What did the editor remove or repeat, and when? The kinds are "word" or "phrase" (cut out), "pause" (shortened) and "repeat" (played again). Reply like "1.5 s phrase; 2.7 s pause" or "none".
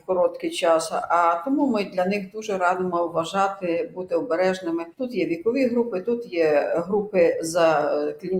4.9 s pause